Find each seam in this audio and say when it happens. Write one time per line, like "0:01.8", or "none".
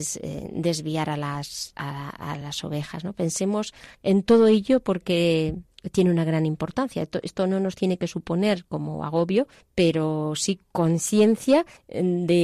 none